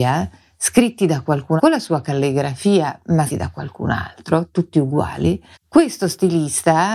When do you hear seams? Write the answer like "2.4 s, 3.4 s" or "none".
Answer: 1.6 s, 3.3 s, 5.5 s

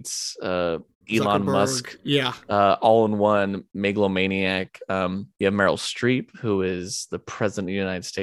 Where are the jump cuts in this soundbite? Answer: 5.3 s

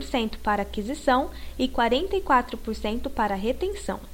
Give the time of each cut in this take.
none

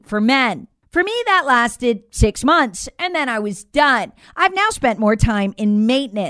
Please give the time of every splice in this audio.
none

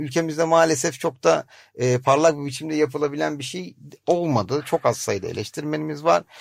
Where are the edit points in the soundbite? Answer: none

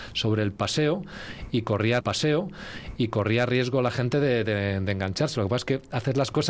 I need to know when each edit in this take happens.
2.0 s

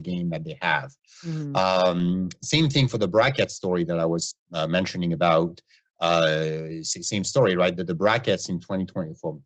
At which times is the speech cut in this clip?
none

